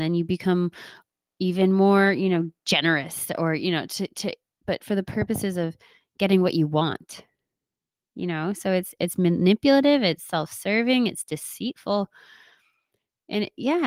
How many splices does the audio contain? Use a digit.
0